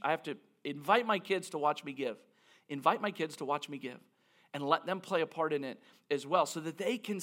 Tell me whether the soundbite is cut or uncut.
uncut